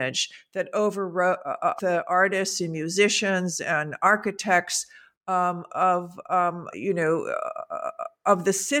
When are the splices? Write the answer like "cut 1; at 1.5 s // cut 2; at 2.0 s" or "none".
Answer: cut 1; at 1.8 s // cut 2; at 5.7 s // cut 3; at 6.7 s